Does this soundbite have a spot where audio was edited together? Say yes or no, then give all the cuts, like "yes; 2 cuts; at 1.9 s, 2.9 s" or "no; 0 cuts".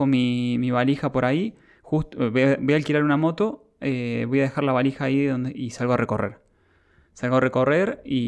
no; 0 cuts